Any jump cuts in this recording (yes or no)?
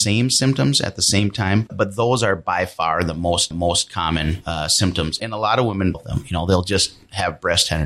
yes